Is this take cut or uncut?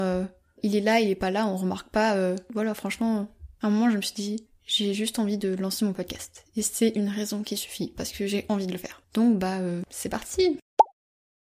cut